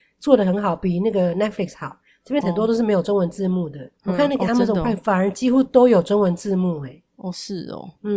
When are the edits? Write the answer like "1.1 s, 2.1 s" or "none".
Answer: 2.4 s, 3.9 s